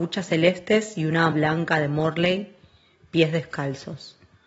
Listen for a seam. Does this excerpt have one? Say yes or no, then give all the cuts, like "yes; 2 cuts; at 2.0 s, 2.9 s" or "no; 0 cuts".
yes; 1 cut; at 1.3 s